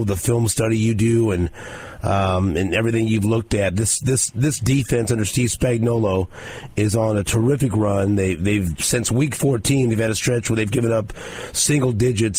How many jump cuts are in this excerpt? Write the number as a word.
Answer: zero